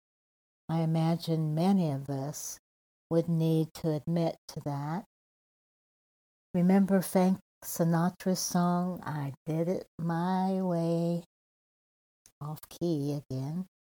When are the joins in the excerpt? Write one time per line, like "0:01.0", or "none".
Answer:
none